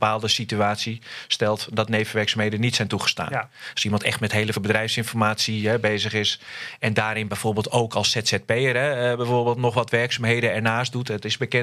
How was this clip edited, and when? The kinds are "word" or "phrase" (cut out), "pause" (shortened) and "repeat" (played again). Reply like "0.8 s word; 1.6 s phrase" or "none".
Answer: 4.5 s word